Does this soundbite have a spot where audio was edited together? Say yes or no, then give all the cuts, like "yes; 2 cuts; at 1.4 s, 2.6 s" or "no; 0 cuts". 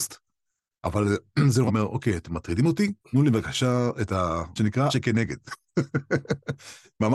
yes; 4 cuts; at 1.7 s, 3.0 s, 4.6 s, 4.9 s